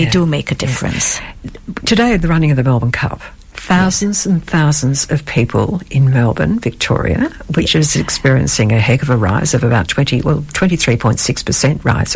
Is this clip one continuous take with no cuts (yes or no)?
yes